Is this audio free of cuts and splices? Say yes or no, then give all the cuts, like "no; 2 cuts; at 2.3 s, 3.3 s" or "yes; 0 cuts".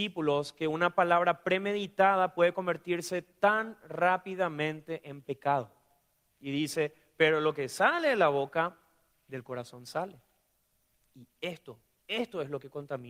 yes; 0 cuts